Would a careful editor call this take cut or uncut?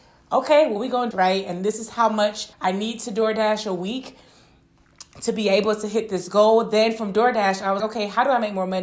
cut